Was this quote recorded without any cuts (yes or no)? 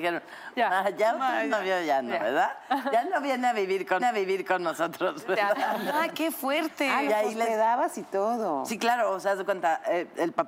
no